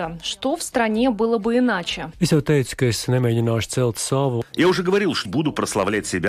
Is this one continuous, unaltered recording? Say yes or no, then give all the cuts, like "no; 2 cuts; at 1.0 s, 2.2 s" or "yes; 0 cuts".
no; 1 cut; at 5.2 s